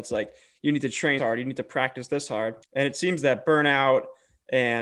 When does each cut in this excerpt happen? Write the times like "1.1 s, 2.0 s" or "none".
1.2 s, 2.6 s